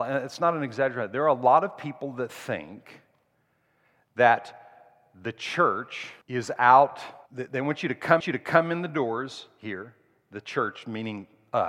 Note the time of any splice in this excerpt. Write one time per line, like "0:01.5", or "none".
0:06.2
0:07.3
0:08.2